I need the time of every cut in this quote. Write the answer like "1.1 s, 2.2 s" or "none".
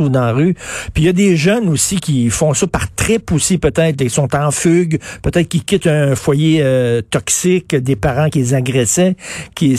8.3 s